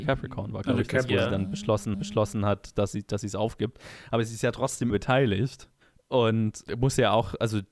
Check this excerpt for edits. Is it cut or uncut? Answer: cut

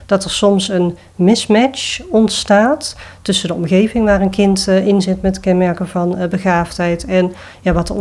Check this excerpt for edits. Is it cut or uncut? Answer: uncut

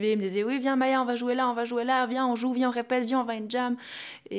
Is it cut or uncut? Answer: uncut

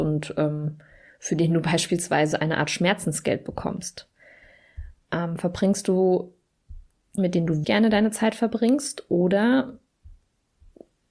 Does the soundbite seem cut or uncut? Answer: cut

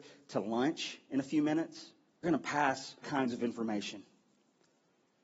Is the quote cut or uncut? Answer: cut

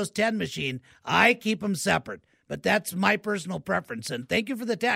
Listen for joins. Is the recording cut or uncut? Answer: uncut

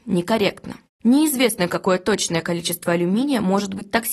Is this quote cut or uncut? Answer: uncut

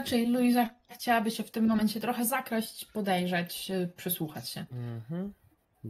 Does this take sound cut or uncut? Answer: uncut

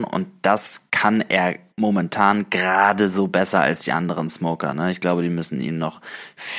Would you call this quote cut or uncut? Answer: uncut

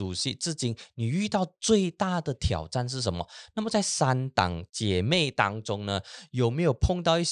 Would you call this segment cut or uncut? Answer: uncut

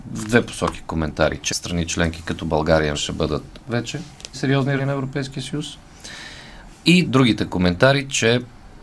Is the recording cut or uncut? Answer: cut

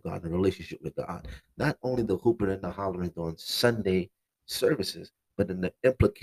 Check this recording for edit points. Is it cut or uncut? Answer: uncut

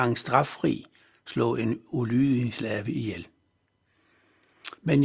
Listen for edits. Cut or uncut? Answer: uncut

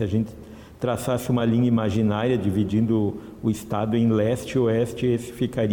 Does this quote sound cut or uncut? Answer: uncut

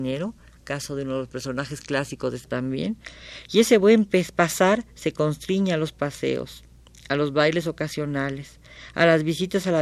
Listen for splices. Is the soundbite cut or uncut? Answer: cut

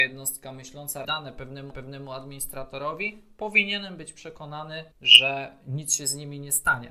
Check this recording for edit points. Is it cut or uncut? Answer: cut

